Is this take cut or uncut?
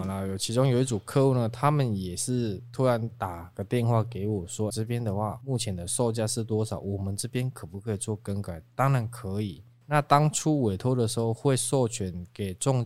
cut